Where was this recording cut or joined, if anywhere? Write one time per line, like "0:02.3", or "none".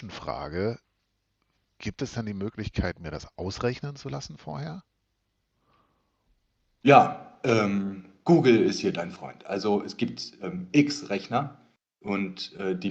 none

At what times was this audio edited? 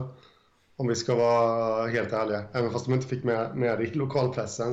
none

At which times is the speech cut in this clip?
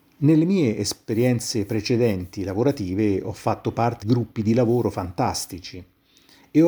0:04.0

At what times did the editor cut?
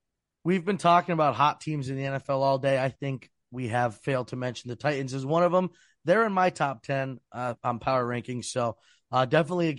none

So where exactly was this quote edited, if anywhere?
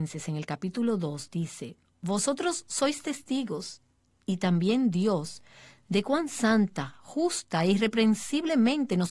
none

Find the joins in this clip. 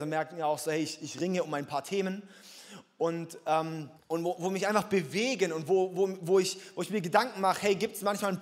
0:04.0

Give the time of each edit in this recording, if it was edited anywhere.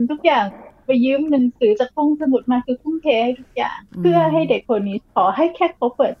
0:03.9
0:05.1

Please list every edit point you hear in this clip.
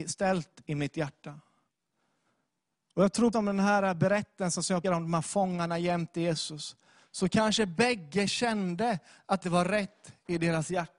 0:03.3
0:04.8
0:09.4

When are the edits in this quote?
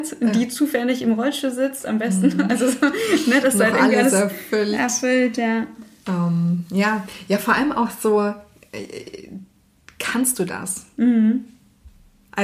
none

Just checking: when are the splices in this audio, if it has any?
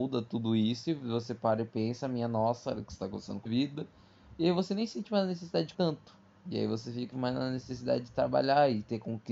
0:03.4
0:05.7
0:07.1

